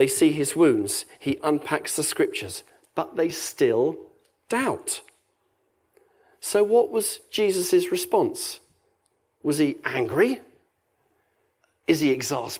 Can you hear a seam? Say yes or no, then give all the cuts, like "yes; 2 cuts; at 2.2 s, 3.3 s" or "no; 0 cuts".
no; 0 cuts